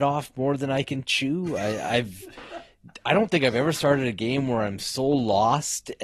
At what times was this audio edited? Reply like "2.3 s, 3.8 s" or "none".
none